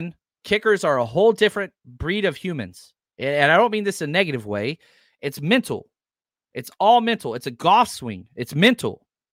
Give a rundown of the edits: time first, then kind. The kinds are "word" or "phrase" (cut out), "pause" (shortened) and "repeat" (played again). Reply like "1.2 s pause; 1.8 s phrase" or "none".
none